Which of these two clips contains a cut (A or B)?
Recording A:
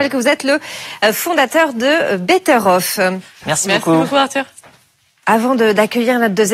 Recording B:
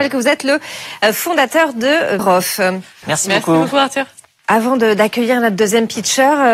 B